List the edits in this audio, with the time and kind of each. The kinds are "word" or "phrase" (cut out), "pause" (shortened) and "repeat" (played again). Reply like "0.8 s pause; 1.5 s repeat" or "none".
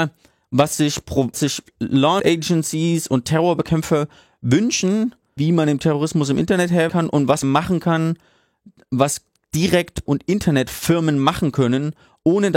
1.3 s word; 2.2 s word; 5.4 s word; 6.9 s word; 7.4 s word; 10.1 s word